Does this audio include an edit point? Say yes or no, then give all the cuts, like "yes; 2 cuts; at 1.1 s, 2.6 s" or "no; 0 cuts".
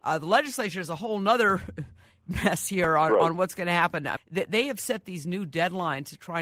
yes; 1 cut; at 4.2 s